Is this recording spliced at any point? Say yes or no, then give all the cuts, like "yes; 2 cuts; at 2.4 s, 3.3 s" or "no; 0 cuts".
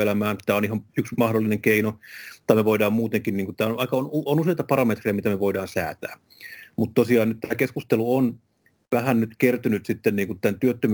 no; 0 cuts